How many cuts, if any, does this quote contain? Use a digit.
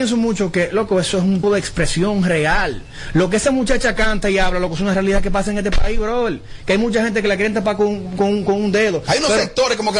1